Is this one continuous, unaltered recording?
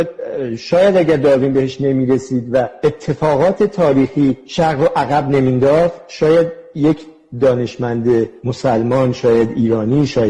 yes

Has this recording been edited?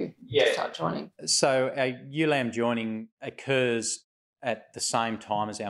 no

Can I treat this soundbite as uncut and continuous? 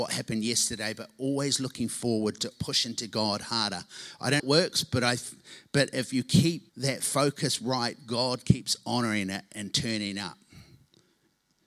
no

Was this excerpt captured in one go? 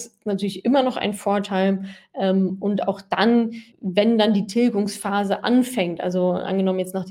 no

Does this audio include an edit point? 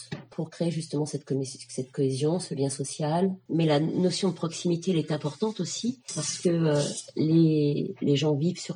no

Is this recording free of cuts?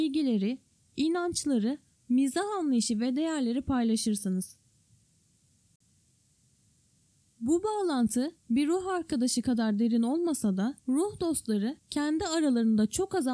no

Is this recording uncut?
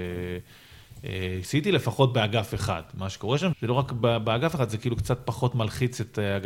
no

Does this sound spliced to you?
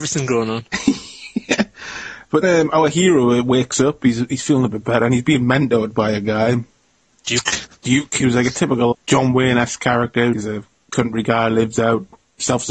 yes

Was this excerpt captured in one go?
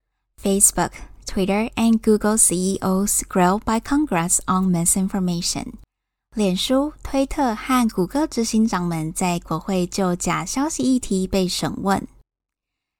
yes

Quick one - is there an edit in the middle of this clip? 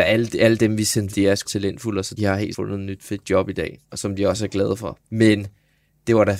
yes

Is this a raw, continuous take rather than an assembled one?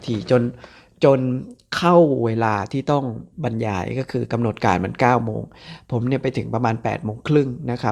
no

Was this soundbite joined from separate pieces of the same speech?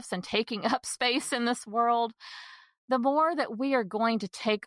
no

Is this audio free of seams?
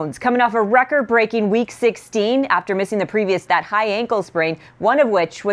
no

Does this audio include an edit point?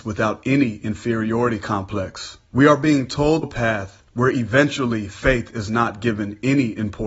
yes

